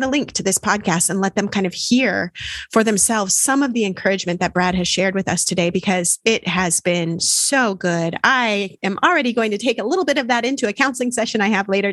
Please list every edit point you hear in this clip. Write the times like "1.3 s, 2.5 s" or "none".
none